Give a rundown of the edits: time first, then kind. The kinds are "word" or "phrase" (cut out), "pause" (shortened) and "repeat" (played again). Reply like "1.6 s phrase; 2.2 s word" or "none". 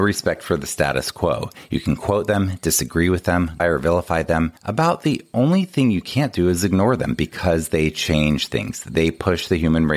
3.6 s word; 4.6 s pause